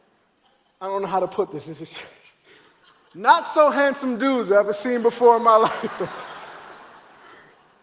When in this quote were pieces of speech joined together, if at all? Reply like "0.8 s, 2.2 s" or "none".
none